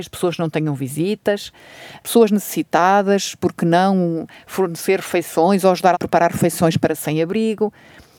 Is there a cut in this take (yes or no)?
yes